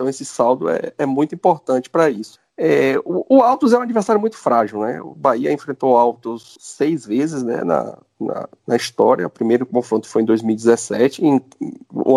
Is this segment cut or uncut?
uncut